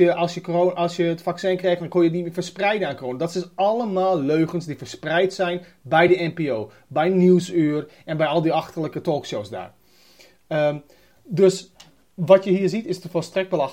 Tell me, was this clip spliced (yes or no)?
no